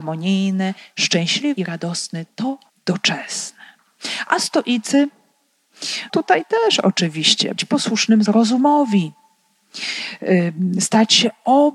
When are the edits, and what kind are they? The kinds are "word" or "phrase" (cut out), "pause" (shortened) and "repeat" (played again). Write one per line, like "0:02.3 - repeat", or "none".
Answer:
0:01.6 - word
0:02.7 - word
0:06.1 - word
0:07.6 - word
0:08.3 - word